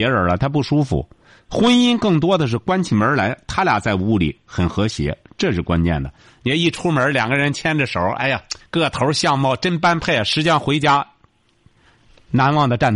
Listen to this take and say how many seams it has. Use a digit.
1